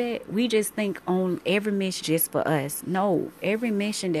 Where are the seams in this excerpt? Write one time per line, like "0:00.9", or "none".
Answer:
0:02.0